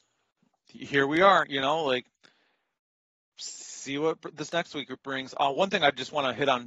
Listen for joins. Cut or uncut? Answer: uncut